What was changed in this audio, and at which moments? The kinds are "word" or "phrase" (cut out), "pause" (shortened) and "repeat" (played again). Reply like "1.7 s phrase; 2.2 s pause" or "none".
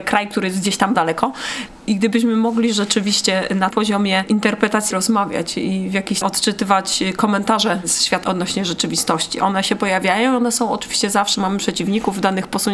0.9 s word; 3.7 s word; 4.9 s word; 6.2 s phrase; 8.2 s word; 11.4 s word